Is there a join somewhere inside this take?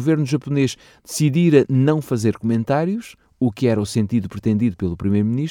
no; 0 cuts

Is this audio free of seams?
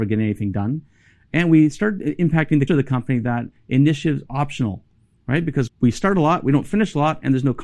no; 3 cuts; at 2.7 s, 4.3 s, 5.7 s

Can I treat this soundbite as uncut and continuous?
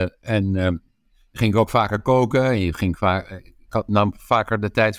yes; 0 cuts

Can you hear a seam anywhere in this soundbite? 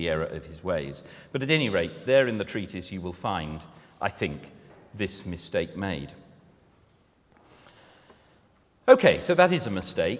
no; 0 cuts

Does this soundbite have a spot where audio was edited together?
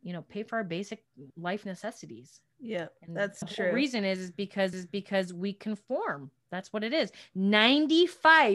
yes; 4 cuts; at 1.3 s, 2.5 s, 3.4 s, 4.7 s

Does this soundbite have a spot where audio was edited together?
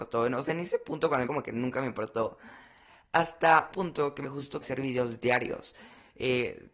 yes; 4 cuts; at 1.2 s, 3.7 s, 4.2 s, 4.6 s

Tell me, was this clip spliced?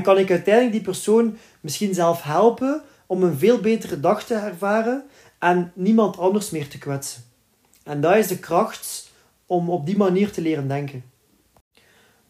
no; 0 cuts

